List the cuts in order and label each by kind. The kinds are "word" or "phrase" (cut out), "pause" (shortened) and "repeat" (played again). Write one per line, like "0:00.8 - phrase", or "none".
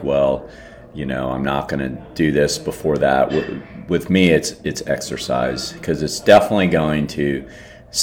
none

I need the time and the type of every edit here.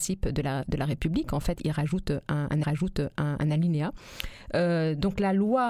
0:02.6 - repeat

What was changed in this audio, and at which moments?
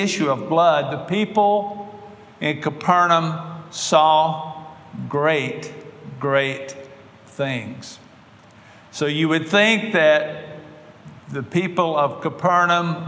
none

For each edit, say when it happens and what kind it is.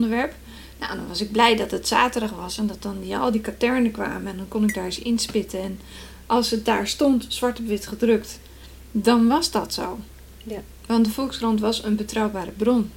none

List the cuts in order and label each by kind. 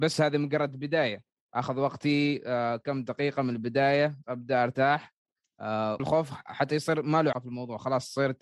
0:01.4 - pause
0:04.2 - word
0:06.0 - word
0:07.3 - word

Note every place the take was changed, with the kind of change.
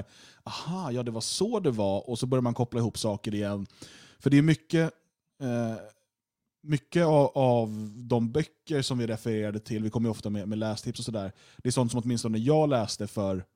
none

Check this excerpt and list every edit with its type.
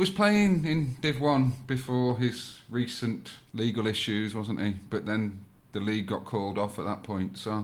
none

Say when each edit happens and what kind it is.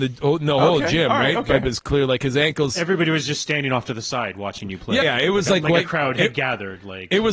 0:01.6 - word
0:05.0 - word

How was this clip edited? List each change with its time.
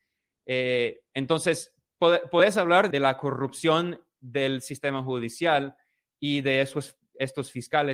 0:02.9 - word

